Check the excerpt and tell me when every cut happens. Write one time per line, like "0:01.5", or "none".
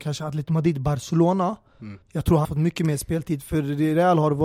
0:02.0
0:02.4